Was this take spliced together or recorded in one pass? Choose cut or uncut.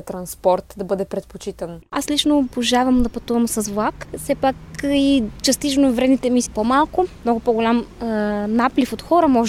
cut